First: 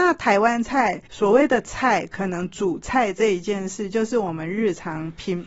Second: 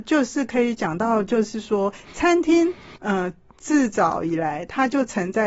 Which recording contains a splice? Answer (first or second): first